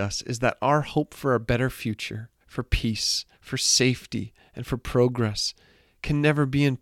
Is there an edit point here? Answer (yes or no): yes